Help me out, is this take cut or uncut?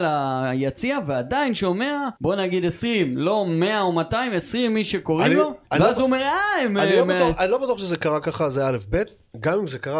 cut